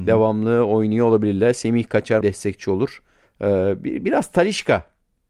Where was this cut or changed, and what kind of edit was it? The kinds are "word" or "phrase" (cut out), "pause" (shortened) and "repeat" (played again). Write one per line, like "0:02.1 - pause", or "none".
0:02.2 - word
0:03.2 - pause

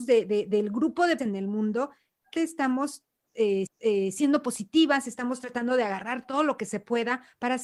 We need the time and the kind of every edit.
0:01.2 - word
0:02.4 - word
0:03.7 - repeat

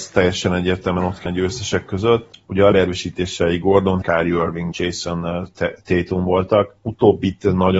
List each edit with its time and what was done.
0:01.3 - word
0:02.7 - word
0:04.0 - word
0:04.7 - word

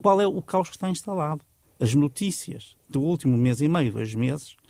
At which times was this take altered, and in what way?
0:01.6 - pause

